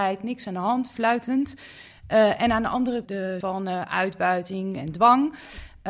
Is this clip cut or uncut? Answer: cut